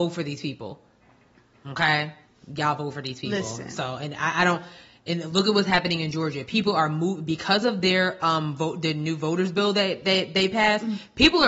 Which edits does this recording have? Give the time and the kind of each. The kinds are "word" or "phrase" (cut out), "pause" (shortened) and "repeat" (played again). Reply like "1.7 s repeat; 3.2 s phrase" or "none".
none